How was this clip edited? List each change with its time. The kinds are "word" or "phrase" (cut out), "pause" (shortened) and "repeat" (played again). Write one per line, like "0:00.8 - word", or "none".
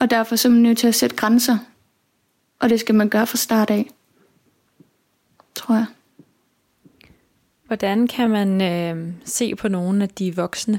none